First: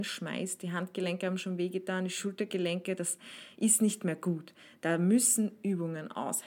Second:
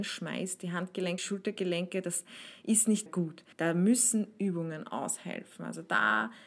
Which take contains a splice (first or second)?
second